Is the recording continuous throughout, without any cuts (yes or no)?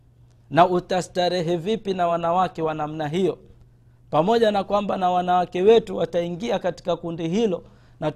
yes